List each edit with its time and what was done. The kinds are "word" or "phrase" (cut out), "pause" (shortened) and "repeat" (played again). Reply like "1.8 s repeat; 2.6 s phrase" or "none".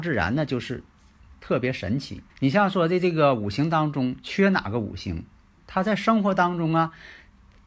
2.3 s pause; 5.6 s word